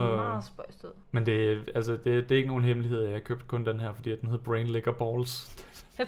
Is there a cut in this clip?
yes; 1 cut; at 1.0 s

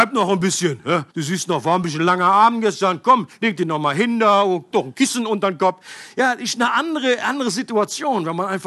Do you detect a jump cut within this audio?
yes; 1 cut; at 1.1 s

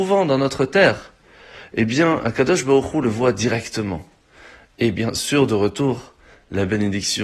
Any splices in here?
no; 0 cuts

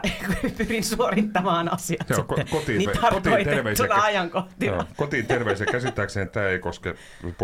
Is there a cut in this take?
yes; 2 cuts; at 2.9 s, 6.3 s

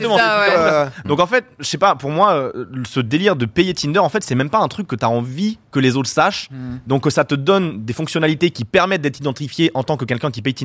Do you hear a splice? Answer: no; 0 cuts

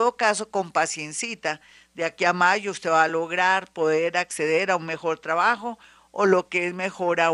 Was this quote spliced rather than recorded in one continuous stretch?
no; 0 cuts

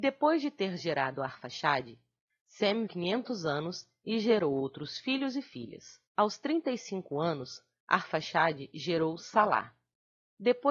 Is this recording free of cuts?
no; 2 cuts; at 2.9 s, 6.1 s

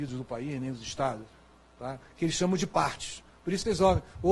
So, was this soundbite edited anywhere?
no; 0 cuts

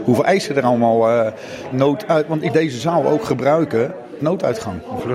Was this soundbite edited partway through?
yes; 3 cuts; at 1.7 s, 2.5 s, 4.2 s

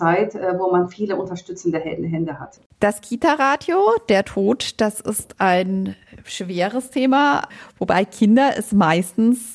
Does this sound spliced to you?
no; 0 cuts

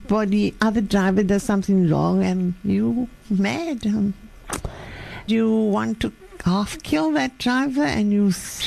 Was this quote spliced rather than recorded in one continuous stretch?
yes; 2 cuts; at 3.2 s, 5.3 s

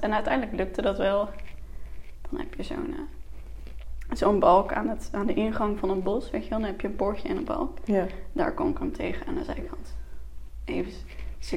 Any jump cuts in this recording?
no; 0 cuts

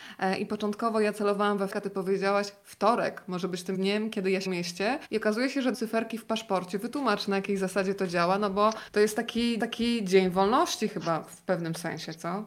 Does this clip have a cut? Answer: yes; 7 cuts; at 1.7 s, 3.7 s, 4.5 s, 5.0 s, 5.7 s, 8.9 s, 9.6 s

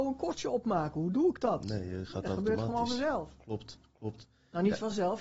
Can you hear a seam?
no; 0 cuts

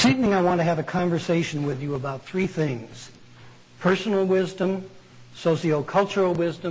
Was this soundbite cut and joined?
no; 0 cuts

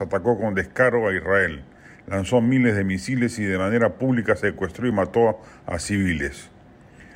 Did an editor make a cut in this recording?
no; 0 cuts

